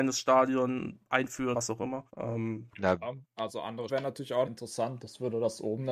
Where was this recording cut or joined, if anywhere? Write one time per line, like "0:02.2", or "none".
0:01.5
0:02.1
0:03.2
0:03.9
0:04.5